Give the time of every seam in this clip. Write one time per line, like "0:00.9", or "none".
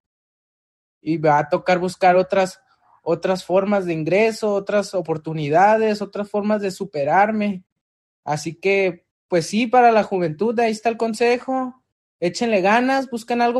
none